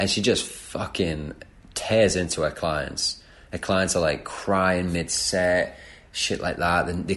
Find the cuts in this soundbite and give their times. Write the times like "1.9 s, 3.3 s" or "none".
none